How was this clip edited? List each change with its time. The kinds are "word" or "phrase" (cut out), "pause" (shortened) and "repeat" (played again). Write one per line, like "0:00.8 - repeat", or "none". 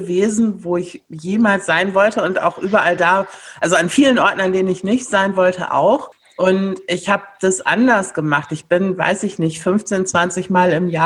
none